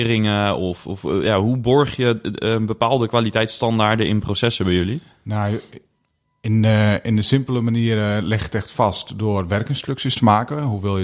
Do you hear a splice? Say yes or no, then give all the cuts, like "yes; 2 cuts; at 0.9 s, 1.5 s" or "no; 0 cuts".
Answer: no; 0 cuts